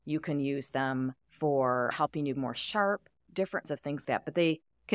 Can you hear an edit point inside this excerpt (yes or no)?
yes